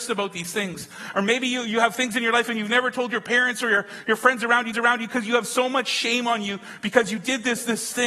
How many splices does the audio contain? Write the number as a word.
one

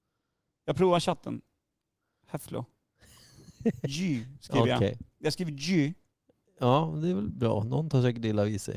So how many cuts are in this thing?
zero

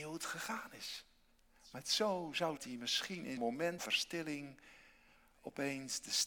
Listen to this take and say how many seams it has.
three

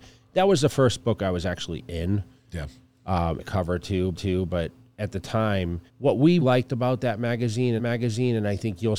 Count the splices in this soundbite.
five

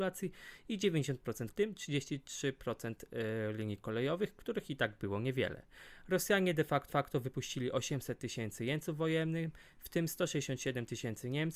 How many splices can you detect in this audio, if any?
two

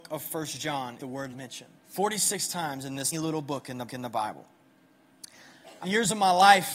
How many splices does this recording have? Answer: six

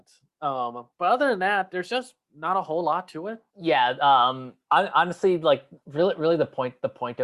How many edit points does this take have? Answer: four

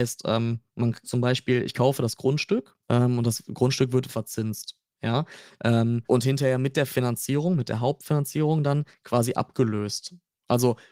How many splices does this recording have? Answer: four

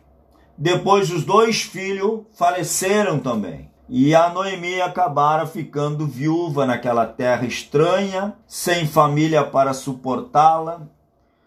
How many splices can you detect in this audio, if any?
two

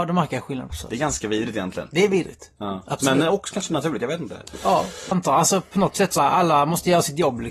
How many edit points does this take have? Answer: two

